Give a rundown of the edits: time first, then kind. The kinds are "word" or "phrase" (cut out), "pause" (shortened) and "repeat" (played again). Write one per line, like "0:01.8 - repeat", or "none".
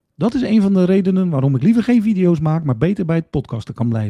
none